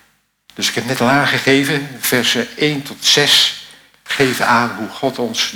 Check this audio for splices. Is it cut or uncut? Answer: uncut